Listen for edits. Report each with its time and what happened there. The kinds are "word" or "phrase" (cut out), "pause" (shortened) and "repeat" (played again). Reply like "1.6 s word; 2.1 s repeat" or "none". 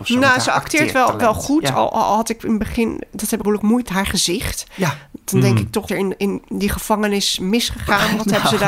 3.4 s phrase; 3.9 s word; 5.9 s phrase